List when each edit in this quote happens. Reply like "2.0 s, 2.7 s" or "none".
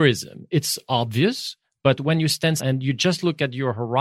2.6 s